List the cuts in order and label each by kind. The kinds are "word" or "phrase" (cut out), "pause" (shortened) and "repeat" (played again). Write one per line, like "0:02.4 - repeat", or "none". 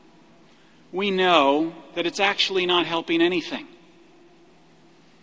none